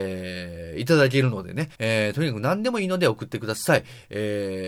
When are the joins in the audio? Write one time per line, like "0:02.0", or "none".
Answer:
0:01.7